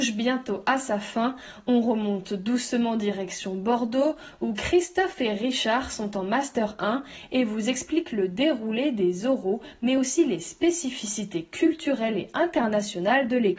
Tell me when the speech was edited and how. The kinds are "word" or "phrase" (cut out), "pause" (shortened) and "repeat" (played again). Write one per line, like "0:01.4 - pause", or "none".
none